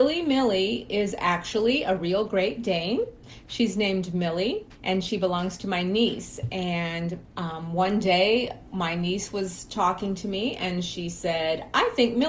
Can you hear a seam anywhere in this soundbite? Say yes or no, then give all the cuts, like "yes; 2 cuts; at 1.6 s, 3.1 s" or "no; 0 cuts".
yes; 1 cut; at 4.7 s